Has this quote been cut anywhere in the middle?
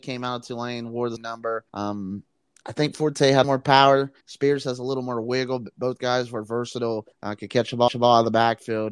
yes; 6 cuts; at 1.2 s, 1.7 s, 3.4 s, 4.2 s, 7.1 s, 7.9 s

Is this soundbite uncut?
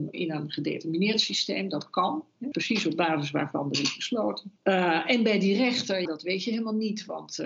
no; 3 cuts; at 2.5 s, 4.6 s, 6.1 s

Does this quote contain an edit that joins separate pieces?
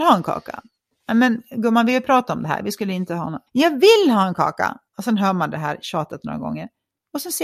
yes; 2 cuts; at 3.5 s, 4.9 s

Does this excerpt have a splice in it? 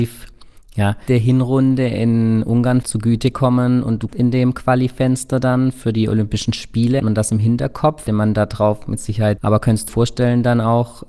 yes; 7 cuts; at 1.1 s, 2.8 s, 4.1 s, 7.0 s, 8.1 s, 9.4 s, 9.9 s

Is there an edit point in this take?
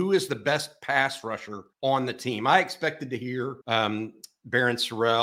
yes; 2 cuts; at 1.7 s, 3.6 s

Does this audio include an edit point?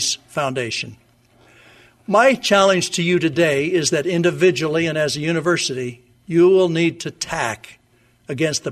no; 0 cuts

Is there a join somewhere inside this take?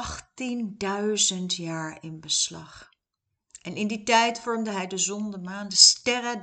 no; 0 cuts

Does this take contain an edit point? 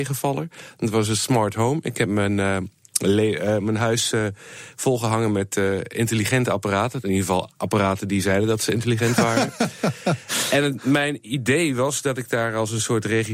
no; 0 cuts

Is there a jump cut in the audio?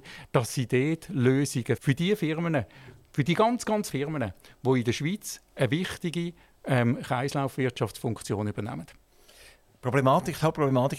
yes; 2 cuts; at 1.8 s, 3.9 s

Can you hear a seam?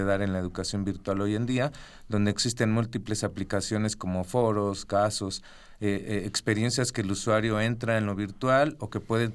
no; 0 cuts

